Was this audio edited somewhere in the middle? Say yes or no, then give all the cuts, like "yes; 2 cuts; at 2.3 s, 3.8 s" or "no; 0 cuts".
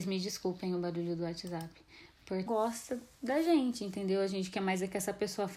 yes; 2 cuts; at 2.5 s, 3.1 s